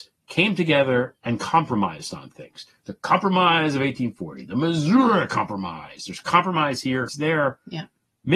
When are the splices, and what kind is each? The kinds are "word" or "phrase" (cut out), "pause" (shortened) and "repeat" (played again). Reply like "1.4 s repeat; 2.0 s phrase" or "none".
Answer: 1.2 s pause; 7.1 s word